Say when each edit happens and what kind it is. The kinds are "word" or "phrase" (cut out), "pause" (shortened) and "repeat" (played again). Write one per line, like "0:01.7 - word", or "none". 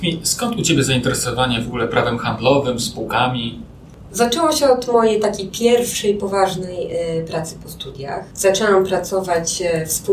none